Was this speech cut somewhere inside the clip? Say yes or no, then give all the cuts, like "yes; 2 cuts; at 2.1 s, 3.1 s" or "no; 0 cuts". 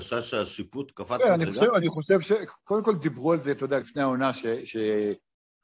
yes; 2 cuts; at 0.9 s, 3.8 s